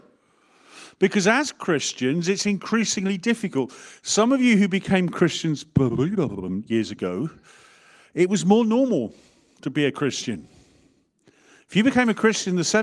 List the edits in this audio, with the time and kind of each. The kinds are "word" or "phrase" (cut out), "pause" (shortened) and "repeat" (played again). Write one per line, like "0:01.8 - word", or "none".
none

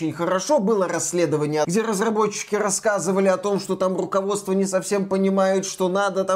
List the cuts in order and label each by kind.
0:01.6 - phrase

